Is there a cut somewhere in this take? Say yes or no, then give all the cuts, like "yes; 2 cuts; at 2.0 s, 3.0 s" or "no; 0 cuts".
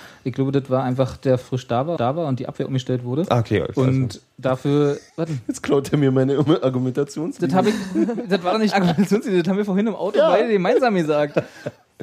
yes; 4 cuts; at 1.4 s, 2.0 s, 5.1 s, 8.7 s